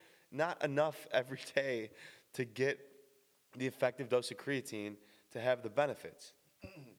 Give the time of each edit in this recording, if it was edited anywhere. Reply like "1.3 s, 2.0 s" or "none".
none

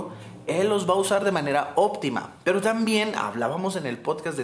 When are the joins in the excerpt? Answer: none

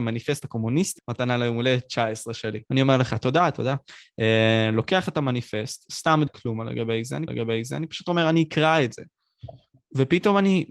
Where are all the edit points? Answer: 1.0 s, 2.7 s, 6.3 s, 7.3 s

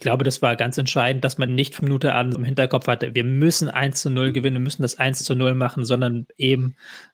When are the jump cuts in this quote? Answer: 1.5 s, 1.8 s, 2.3 s

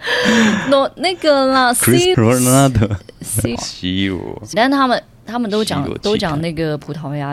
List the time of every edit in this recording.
2.1 s, 3.6 s, 4.5 s

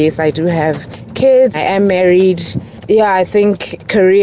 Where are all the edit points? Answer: 1.5 s, 2.8 s

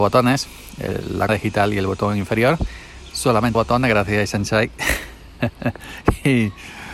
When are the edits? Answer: 1.3 s, 3.5 s

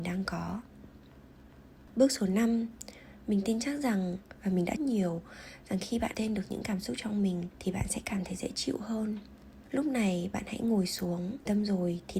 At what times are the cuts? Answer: 4.8 s, 6.1 s

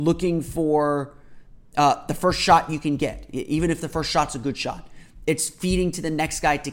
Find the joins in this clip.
none

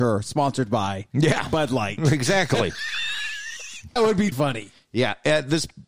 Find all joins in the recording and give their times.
4.0 s, 4.3 s

